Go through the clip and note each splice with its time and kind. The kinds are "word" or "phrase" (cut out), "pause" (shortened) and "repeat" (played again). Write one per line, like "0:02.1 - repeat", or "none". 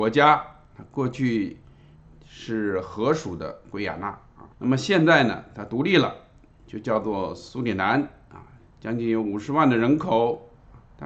0:04.5 - pause